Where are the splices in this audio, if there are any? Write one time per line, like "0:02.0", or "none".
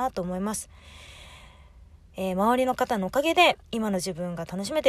0:03.6